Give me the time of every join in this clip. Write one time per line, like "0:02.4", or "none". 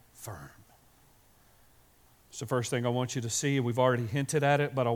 none